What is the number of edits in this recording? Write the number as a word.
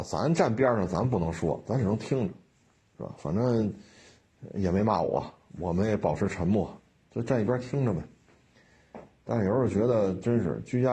zero